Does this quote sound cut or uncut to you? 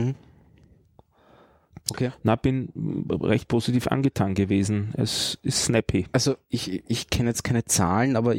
uncut